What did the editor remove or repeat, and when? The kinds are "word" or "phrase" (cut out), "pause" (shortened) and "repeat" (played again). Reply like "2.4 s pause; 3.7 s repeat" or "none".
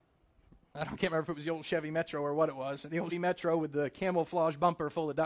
3.1 s word